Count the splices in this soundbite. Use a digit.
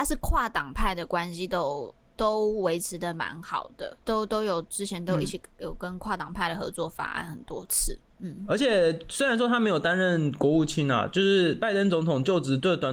1